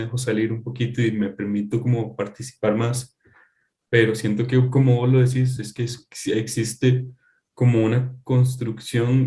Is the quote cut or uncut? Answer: uncut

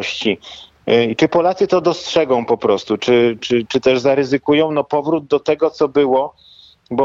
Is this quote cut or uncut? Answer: uncut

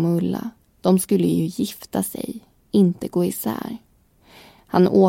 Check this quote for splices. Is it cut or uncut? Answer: uncut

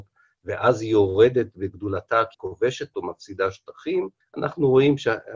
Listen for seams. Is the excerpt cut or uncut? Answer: cut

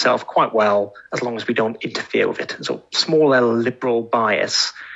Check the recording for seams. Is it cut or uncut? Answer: uncut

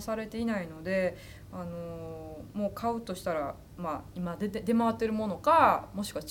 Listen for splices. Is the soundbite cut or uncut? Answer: uncut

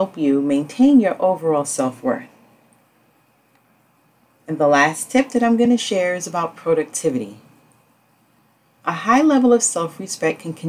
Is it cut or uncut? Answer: uncut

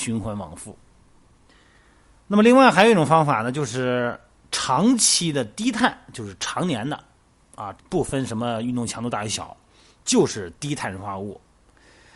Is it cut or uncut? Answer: cut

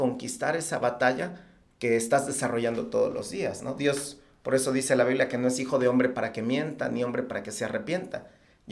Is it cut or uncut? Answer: uncut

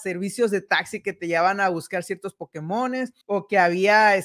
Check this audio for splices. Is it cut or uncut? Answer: cut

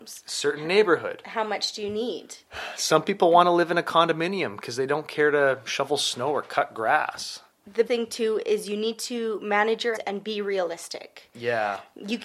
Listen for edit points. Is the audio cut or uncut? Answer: cut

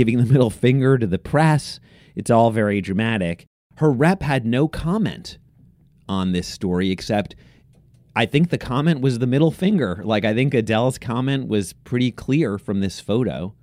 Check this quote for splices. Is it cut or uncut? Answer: uncut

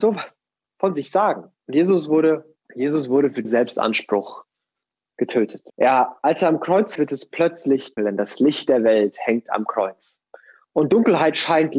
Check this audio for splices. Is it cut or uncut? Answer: cut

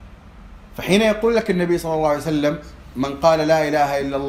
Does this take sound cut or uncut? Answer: uncut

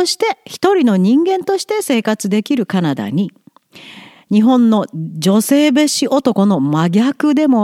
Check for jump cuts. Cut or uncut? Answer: uncut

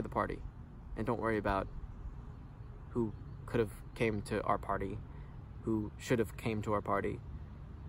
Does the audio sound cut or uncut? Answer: uncut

